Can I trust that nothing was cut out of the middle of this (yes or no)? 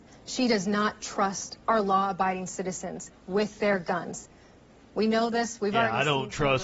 yes